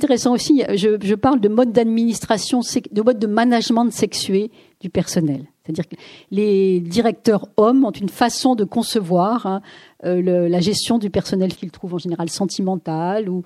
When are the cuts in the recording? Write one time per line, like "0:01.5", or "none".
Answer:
0:11.5